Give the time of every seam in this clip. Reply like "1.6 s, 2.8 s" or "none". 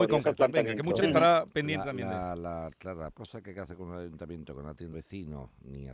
1.0 s, 2.7 s, 3.1 s, 4.9 s